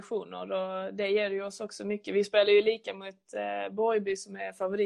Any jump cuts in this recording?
no; 0 cuts

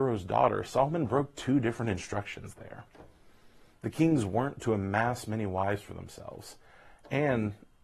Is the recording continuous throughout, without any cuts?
yes; 0 cuts

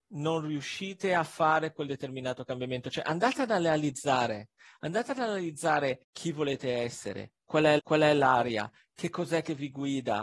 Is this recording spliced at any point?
yes; 2 cuts; at 6.0 s, 7.8 s

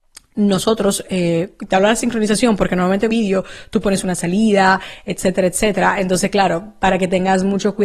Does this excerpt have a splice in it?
yes; 2 cuts; at 3.1 s, 4.0 s

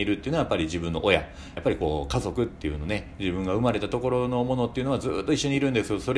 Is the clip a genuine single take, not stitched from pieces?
no; 1 cut; at 1.6 s

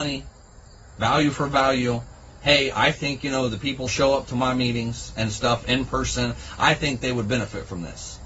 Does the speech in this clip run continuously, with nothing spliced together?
no; 1 cut; at 3.9 s

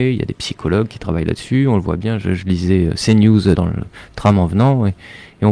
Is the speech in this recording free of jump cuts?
no; 1 cut; at 3.5 s

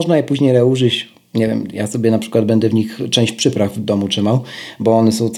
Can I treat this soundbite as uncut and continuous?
yes; 0 cuts

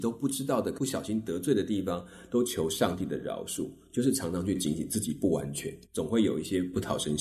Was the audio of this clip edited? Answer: yes; 1 cut; at 5.9 s

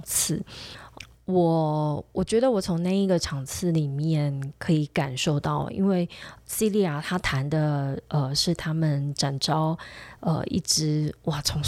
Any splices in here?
no; 0 cuts

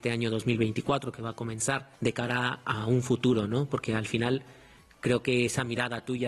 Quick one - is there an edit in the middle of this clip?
no; 0 cuts

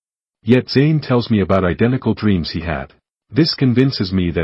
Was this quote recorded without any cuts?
no; 1 cut; at 3.1 s

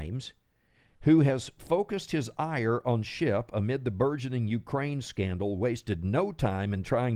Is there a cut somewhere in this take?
no; 0 cuts

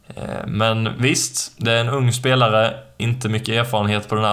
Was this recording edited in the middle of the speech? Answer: no; 0 cuts

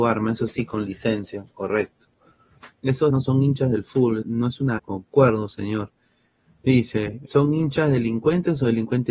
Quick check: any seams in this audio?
yes; 4 cuts; at 3.1 s, 4.2 s, 4.8 s, 7.3 s

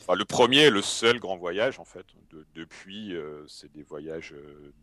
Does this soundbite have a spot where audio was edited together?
no; 0 cuts

